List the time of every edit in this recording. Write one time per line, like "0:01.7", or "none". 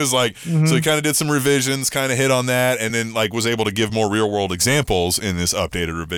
none